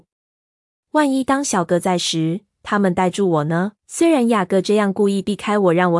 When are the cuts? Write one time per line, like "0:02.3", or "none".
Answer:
0:03.8